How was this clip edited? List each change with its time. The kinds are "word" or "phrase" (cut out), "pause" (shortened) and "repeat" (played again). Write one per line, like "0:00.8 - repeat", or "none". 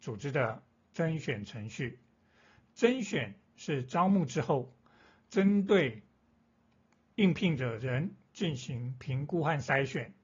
none